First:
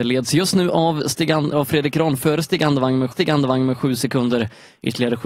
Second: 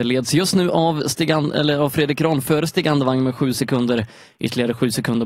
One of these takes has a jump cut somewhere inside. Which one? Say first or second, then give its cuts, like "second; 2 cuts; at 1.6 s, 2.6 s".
first; 2 cuts; at 1.5 s, 3.1 s